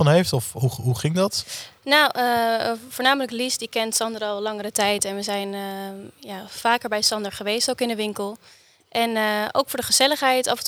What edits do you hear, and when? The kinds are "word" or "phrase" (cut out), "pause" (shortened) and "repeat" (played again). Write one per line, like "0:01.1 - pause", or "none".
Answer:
none